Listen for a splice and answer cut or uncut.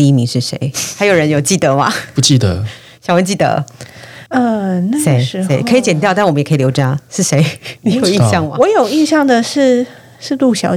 cut